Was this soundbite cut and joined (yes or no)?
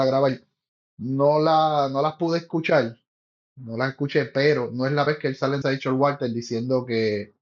yes